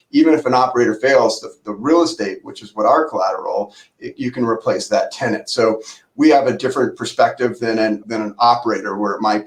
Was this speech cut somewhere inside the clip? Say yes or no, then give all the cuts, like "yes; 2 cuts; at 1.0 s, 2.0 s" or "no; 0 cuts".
yes; 1 cut; at 8.0 s